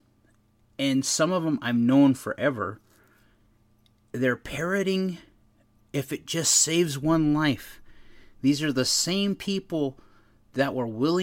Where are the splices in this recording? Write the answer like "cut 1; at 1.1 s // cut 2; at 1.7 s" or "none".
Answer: none

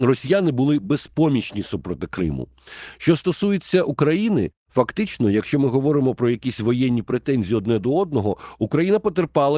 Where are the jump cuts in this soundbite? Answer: none

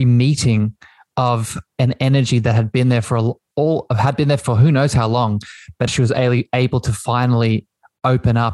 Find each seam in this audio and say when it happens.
cut 1; at 5.9 s

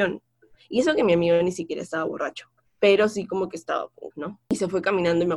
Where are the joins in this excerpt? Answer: cut 1; at 2.7 s // cut 2; at 4.1 s

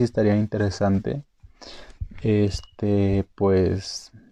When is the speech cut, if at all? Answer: none

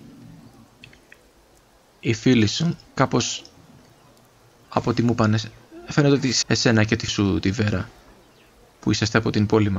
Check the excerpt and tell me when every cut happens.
cut 1; at 2.9 s // cut 2; at 6.4 s // cut 3; at 7.1 s

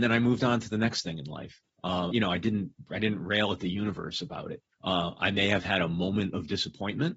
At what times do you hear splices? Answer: cut 1; at 1.7 s // cut 2; at 2.1 s // cut 3; at 4.7 s

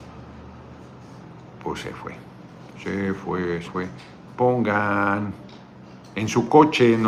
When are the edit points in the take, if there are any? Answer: cut 1; at 3.6 s

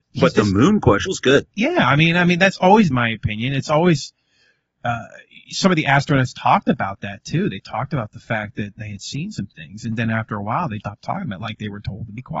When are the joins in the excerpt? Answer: cut 1; at 1.1 s // cut 2; at 2.9 s // cut 3; at 8.8 s // cut 4; at 10.8 s

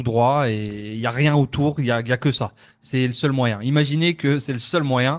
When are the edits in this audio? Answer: none

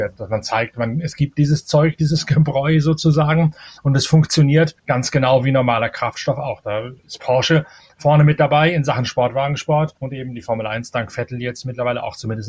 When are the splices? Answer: cut 1; at 4.8 s // cut 2; at 7.0 s // cut 3; at 10.0 s

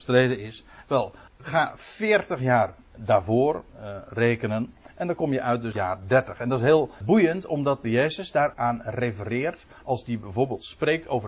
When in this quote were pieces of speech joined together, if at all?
cut 1; at 1.3 s // cut 2; at 3.7 s // cut 3; at 5.7 s // cut 4; at 7.0 s // cut 5; at 7.8 s // cut 6; at 8.5 s

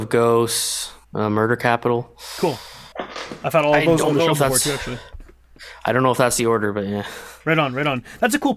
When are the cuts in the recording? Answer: cut 1; at 1.0 s // cut 2; at 2.9 s

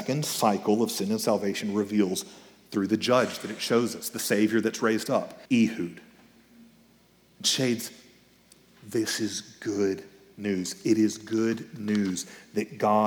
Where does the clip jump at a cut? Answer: cut 1; at 5.5 s

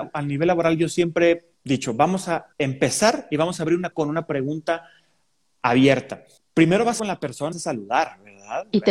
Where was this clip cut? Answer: cut 1; at 1.5 s // cut 2; at 2.5 s // cut 3; at 3.9 s // cut 4; at 6.4 s // cut 5; at 7.0 s // cut 6; at 7.5 s

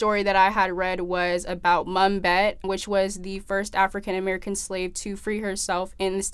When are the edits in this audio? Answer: cut 1; at 2.6 s

